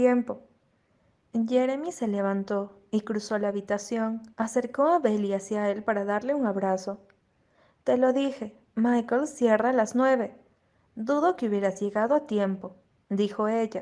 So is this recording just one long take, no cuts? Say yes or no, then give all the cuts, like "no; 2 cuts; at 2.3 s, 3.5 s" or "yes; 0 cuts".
no; 1 cut; at 4.3 s